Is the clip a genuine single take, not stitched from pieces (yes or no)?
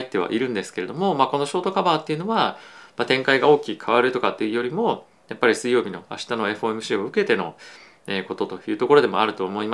yes